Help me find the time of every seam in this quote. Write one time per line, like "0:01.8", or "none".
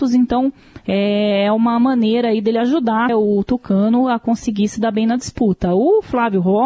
0:03.1